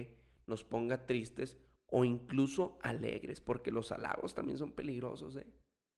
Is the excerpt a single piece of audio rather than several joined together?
yes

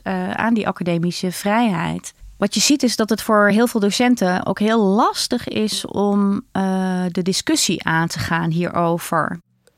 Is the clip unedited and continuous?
yes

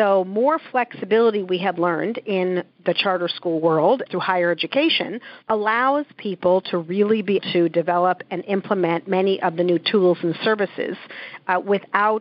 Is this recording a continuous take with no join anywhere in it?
no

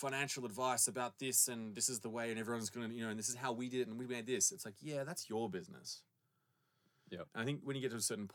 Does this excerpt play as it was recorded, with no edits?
yes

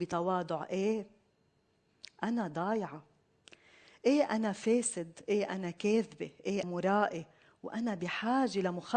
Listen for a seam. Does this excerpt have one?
yes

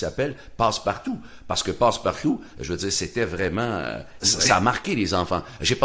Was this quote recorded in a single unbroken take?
no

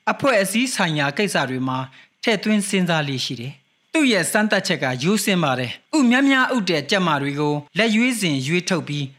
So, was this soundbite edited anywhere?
yes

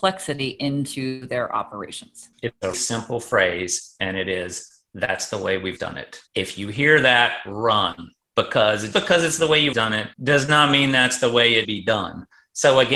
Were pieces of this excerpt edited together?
yes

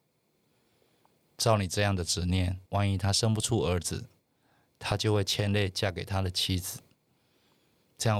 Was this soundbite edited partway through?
yes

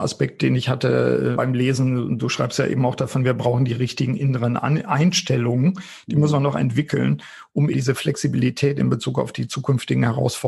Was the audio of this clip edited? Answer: yes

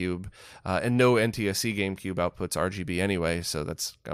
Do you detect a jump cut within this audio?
no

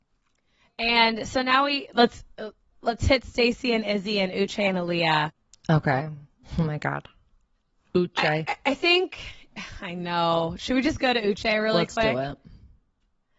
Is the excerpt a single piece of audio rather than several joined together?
yes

